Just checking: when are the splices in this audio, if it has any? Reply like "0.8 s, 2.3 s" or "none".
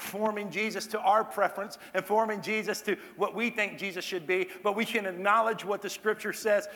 none